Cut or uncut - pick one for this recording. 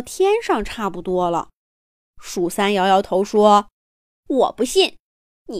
cut